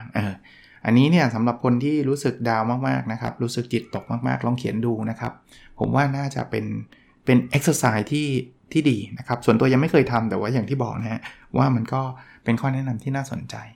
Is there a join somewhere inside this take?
no; 0 cuts

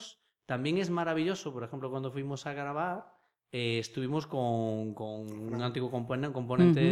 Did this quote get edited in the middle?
no; 0 cuts

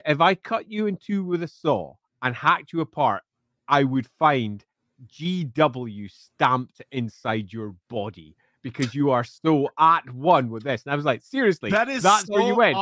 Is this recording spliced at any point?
no; 0 cuts

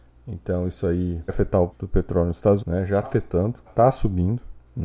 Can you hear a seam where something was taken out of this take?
yes; 5 cuts; at 1.3 s, 1.7 s, 2.6 s, 3.0 s, 3.7 s

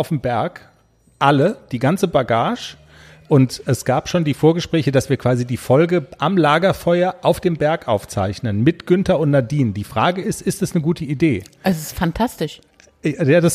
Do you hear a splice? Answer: no; 0 cuts

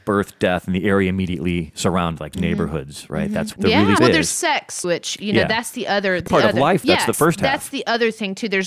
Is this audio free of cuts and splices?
no; 6 cuts; at 2.3 s, 3.5 s, 4.0 s, 4.8 s, 6.3 s, 7.1 s

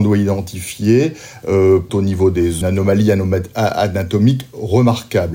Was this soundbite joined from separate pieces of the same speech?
yes; 2 cuts; at 1.9 s, 2.6 s

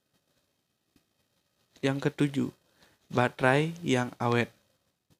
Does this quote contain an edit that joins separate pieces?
no; 0 cuts

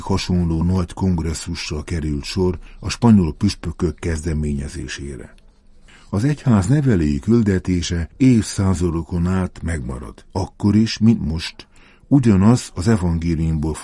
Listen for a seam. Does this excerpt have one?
yes; 1 cut; at 10.3 s

